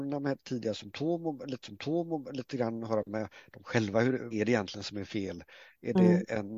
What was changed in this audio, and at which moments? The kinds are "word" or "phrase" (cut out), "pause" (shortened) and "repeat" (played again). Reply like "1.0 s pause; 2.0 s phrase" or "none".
1.6 s repeat; 4.3 s phrase

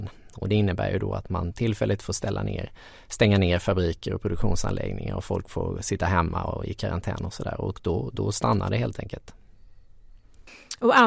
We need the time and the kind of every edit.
none

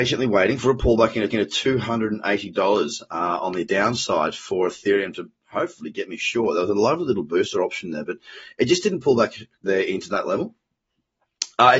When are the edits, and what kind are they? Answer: 1.3 s repeat; 9.6 s word

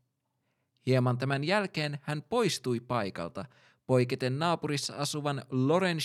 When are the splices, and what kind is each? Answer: none

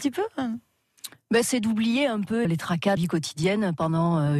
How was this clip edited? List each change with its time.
1.4 s word; 2.4 s word; 3.0 s word

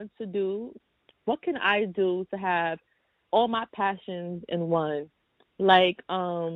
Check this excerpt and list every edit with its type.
none

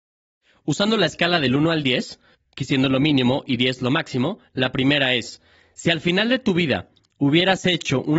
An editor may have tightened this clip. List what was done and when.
2.3 s pause

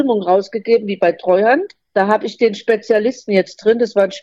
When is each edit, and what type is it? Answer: 1.8 s pause

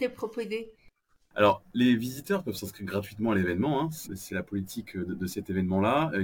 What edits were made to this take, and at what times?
none

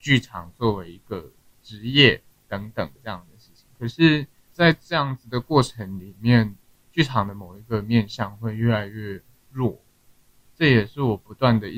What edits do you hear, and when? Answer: 3.0 s pause

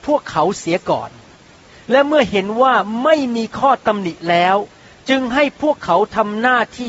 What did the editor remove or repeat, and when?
none

